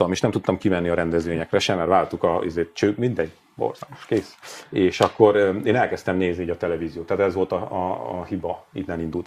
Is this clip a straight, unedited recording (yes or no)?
yes